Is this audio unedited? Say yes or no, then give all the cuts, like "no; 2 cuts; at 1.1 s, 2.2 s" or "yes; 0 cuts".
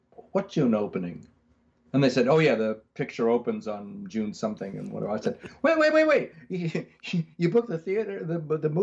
yes; 0 cuts